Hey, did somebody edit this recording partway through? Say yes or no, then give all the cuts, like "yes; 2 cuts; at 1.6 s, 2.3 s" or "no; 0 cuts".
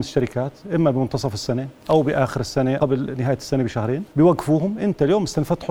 yes; 2 cuts; at 2.8 s, 4.1 s